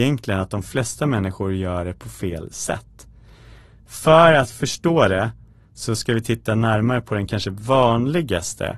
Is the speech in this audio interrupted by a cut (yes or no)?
no